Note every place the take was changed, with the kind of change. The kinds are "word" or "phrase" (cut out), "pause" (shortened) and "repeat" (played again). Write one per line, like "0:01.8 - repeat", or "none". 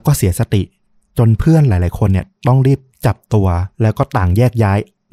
0:03.7 - pause